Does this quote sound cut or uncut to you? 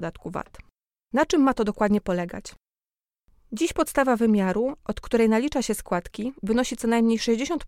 uncut